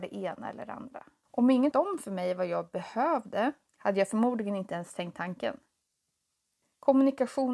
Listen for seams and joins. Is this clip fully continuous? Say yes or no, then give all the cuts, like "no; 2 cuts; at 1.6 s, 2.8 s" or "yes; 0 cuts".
no; 1 cut; at 1.7 s